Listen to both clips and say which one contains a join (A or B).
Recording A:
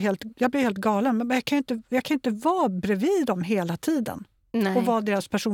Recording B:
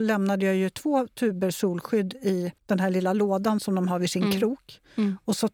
B